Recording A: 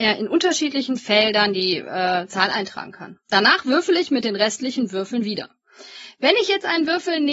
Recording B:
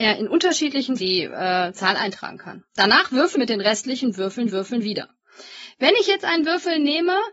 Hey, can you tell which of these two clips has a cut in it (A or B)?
B